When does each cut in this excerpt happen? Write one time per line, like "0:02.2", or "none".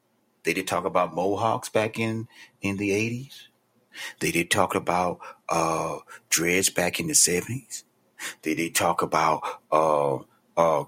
none